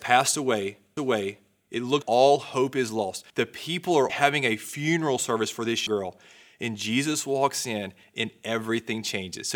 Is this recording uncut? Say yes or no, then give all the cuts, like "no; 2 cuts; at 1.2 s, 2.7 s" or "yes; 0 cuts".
no; 5 cuts; at 1.0 s, 2.0 s, 3.3 s, 4.1 s, 5.9 s